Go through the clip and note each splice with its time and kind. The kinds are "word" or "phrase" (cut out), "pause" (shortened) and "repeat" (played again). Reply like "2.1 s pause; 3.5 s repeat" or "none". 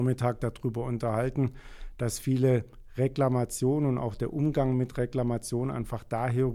none

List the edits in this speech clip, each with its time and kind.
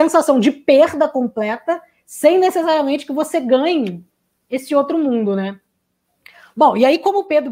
none

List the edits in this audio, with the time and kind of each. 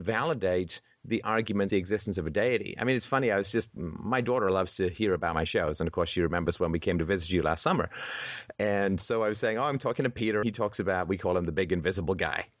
1.7 s word; 3.8 s word; 9.0 s word; 10.4 s word

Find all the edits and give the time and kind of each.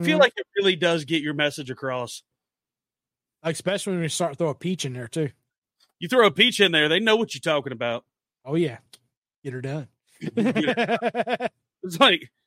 none

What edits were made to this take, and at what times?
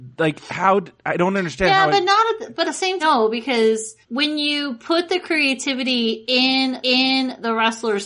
2.6 s word; 3.0 s word; 4.0 s pause; 6.8 s repeat

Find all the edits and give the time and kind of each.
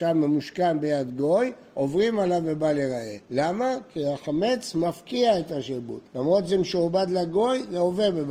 3.2 s pause; 6.1 s pause

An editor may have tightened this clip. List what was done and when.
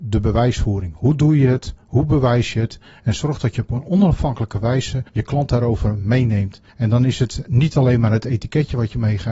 5.1 s pause; 6.7 s pause

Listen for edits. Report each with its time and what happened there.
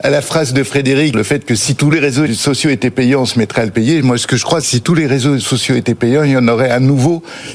1.1 s word; 1.9 s phrase; 2.3 s word; 4.6 s word

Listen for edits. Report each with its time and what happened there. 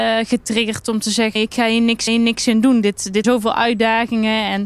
1.4 s word; 2.1 s repeat; 3.2 s word

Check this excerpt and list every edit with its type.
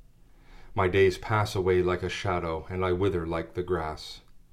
none

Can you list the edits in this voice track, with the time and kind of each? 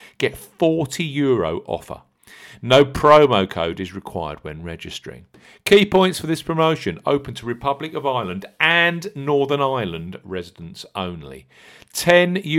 none

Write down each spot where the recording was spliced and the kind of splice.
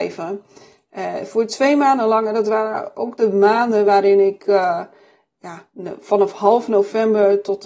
none

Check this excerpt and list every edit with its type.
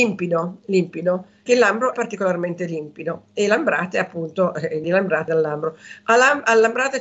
1.5 s word; 1.9 s word; 4.8 s word; 5.3 s word

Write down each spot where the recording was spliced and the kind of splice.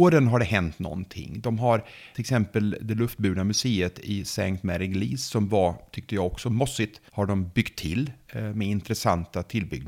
2.1 s word; 7.1 s pause

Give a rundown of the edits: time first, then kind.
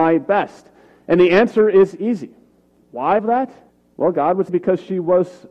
3.2 s word; 3.7 s pause; 4.5 s word

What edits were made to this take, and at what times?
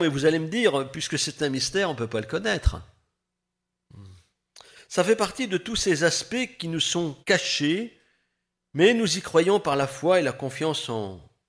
7.2 s pause

